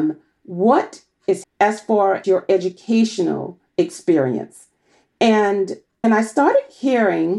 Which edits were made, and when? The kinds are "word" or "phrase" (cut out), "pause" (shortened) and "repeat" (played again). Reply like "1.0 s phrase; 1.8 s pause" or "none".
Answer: 1.4 s word; 2.2 s word; 6.0 s word